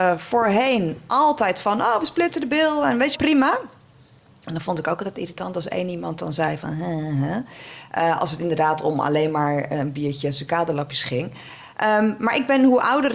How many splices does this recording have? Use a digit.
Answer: 1